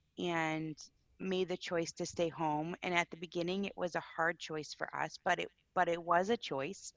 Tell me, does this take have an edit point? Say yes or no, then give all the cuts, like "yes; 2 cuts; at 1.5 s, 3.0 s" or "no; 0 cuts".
no; 0 cuts